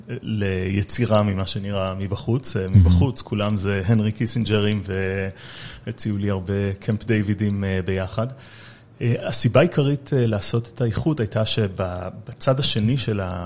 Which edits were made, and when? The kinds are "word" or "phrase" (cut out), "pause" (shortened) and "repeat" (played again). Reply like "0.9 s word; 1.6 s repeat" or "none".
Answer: 9.2 s word